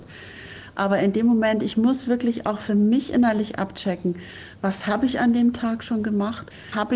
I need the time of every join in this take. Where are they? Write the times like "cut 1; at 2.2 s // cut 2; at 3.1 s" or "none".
none

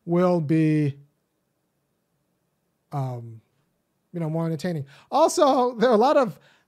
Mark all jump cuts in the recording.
none

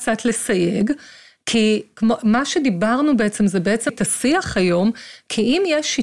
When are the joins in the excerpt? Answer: cut 1; at 3.9 s

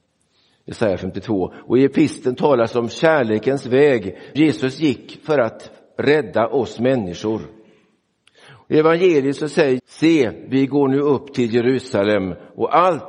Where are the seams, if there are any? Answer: cut 1; at 4.3 s // cut 2; at 9.8 s

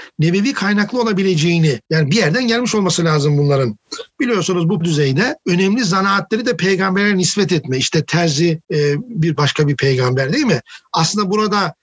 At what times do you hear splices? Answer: cut 1; at 1.8 s // cut 2; at 4.8 s // cut 3; at 5.4 s // cut 4; at 8.6 s // cut 5; at 9.3 s

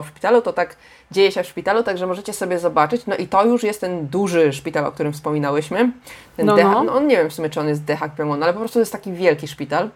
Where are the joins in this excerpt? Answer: none

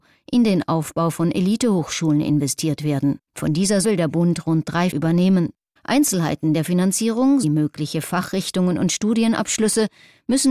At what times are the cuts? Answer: cut 1; at 3.3 s // cut 2; at 3.8 s // cut 3; at 4.9 s // cut 4; at 5.8 s // cut 5; at 7.4 s

